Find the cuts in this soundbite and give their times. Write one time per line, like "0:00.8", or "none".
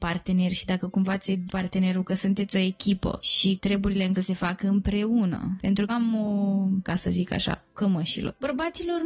0:01.5
0:03.6
0:04.1
0:05.9
0:06.8
0:07.7